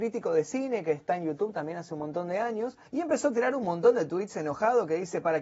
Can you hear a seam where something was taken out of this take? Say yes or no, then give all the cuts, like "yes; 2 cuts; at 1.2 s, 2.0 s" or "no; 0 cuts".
yes; 1 cut; at 2.9 s